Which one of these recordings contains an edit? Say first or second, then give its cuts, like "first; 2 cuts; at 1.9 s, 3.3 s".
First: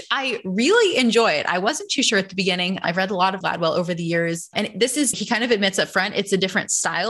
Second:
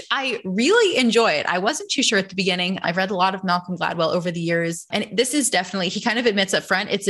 first; 2 cuts; at 3.4 s, 5.1 s